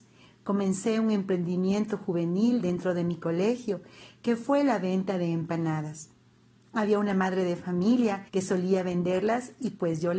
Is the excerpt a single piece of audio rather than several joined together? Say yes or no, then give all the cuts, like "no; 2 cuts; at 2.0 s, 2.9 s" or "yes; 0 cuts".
no; 1 cut; at 8.3 s